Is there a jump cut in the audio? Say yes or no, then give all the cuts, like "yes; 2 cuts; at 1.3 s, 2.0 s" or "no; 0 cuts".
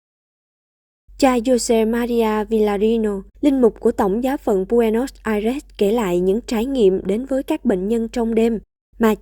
yes; 1 cut; at 3.3 s